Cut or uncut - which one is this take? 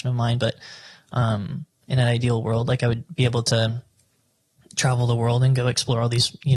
uncut